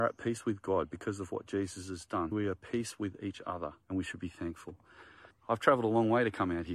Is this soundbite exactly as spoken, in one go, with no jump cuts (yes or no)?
no